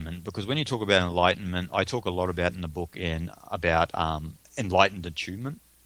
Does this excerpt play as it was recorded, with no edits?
no; 1 cut; at 4.4 s

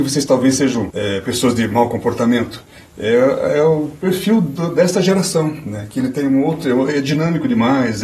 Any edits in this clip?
no; 0 cuts

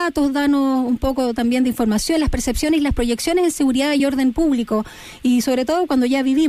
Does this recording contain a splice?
no; 0 cuts

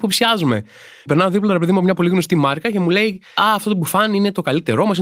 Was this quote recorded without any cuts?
yes; 0 cuts

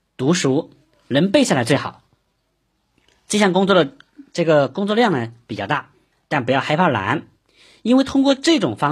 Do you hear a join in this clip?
yes; 1 cut; at 6.1 s

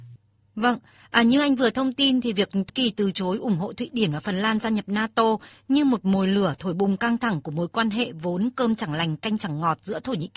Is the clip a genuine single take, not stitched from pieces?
no; 1 cut; at 2.7 s

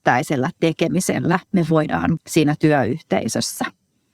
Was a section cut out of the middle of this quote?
yes; 1 cut; at 2.2 s

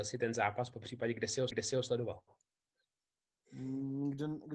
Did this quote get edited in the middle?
yes; 1 cut; at 1.5 s

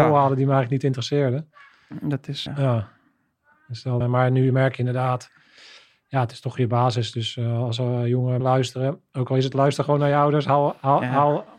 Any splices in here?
yes; 4 cuts; at 2.5 s, 4.0 s, 8.4 s, 9.5 s

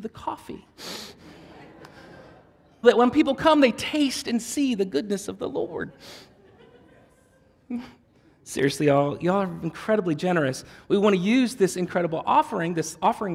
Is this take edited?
yes; 1 cut; at 2.8 s

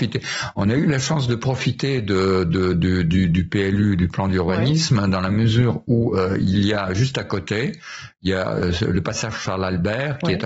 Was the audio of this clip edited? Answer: no; 0 cuts

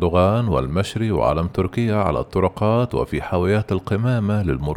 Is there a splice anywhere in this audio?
no; 0 cuts

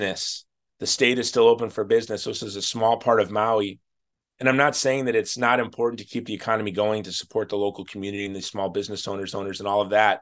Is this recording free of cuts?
no; 1 cut; at 9.3 s

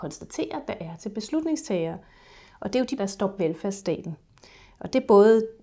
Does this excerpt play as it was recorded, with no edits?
no; 2 cuts; at 3.0 s, 3.4 s

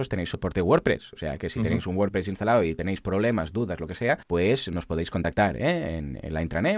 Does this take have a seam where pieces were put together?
yes; 1 cut; at 4.2 s

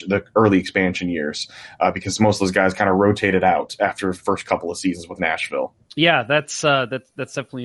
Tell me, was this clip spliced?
yes; 1 cut; at 5.8 s

